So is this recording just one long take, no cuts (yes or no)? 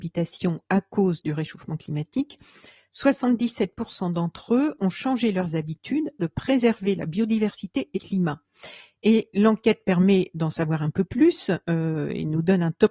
no